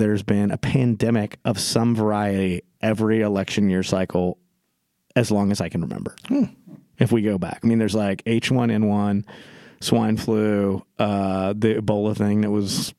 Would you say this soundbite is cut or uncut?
uncut